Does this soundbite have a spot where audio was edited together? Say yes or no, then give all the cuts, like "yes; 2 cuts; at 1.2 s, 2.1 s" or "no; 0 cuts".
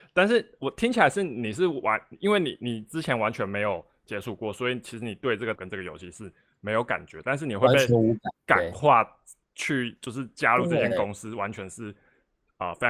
yes; 2 cuts; at 5.6 s, 8.3 s